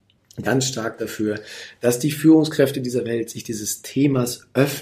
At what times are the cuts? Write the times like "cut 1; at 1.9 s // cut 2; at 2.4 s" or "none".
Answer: none